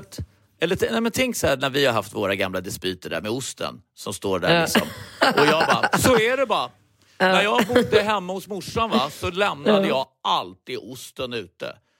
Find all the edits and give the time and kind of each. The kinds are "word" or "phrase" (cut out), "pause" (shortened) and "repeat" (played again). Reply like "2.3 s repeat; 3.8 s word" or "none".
none